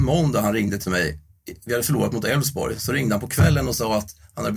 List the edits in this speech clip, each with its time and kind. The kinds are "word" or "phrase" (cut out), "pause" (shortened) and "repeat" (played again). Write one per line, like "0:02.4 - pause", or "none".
none